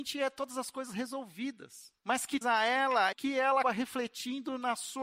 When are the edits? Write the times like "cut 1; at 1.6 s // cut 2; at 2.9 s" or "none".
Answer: cut 1; at 2.0 s // cut 2; at 2.4 s // cut 3; at 3.1 s // cut 4; at 3.6 s